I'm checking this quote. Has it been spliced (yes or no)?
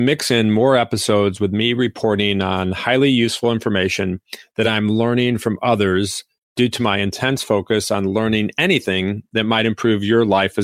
no